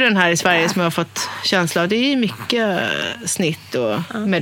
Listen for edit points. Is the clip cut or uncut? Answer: uncut